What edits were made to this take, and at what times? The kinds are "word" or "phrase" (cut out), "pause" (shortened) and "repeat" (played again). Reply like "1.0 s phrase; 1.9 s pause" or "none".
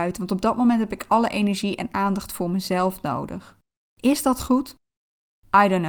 3.8 s pause